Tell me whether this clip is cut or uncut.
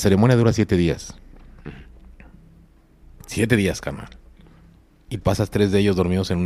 cut